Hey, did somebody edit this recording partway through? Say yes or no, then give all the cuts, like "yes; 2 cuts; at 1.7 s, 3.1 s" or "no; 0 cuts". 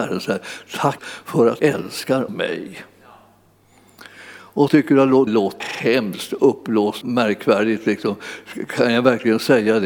yes; 7 cuts; at 1.0 s, 1.6 s, 2.3 s, 4.7 s, 5.3 s, 5.6 s, 7.0 s